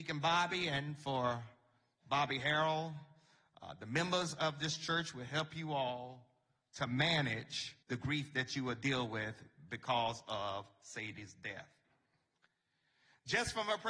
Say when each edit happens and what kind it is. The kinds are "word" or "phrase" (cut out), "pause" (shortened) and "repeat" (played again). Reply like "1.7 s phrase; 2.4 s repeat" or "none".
7.8 s pause